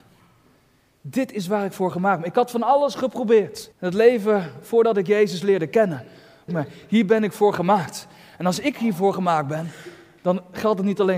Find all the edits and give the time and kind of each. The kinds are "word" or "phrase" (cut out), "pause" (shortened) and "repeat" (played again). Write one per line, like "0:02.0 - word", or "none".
0:03.7 - pause
0:06.5 - phrase